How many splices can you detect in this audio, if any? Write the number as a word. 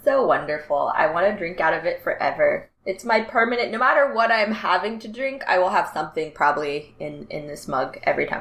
one